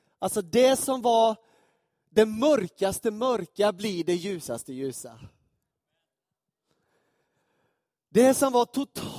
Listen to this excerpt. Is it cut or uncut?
uncut